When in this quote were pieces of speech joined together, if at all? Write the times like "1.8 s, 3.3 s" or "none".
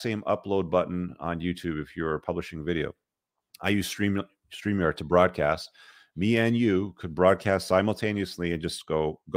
none